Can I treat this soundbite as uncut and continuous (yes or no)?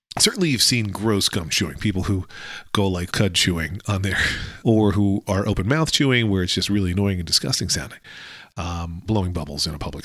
no